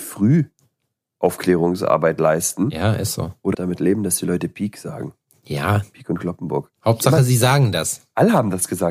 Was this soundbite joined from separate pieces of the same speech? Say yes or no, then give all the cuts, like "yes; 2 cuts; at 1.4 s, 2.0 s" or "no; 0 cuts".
yes; 1 cut; at 3.5 s